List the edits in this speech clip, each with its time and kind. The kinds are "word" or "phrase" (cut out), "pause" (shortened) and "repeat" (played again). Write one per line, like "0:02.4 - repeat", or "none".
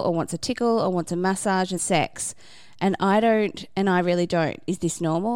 0:01.8 - word